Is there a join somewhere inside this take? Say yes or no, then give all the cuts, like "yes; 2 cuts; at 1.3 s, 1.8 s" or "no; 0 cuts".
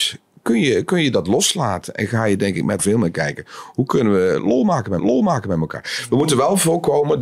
yes; 2 cuts; at 2.8 s, 5.0 s